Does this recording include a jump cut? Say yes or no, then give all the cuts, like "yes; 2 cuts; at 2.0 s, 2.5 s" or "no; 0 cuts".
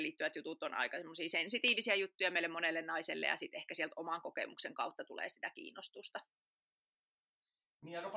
no; 0 cuts